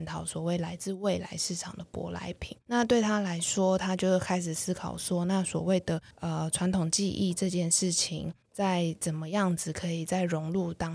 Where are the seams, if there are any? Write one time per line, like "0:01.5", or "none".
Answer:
0:02.6
0:06.1
0:08.4